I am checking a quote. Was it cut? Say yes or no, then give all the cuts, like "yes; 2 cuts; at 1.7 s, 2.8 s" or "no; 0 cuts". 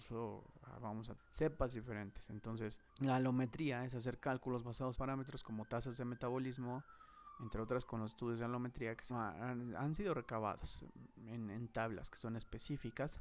yes; 5 cuts; at 1.2 s, 2.9 s, 4.9 s, 7.9 s, 9.1 s